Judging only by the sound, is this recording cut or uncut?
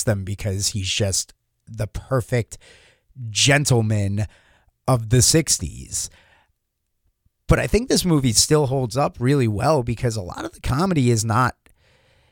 uncut